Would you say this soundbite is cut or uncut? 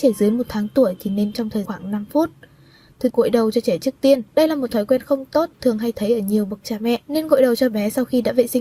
cut